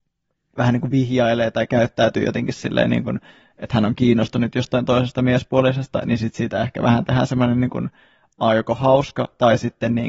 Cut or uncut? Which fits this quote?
uncut